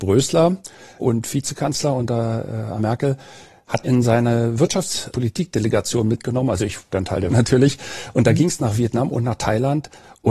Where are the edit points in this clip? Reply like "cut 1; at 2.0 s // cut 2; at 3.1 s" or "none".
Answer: cut 1; at 1.0 s // cut 2; at 2.8 s // cut 3; at 3.8 s // cut 4; at 5.1 s // cut 5; at 6.9 s // cut 6; at 7.3 s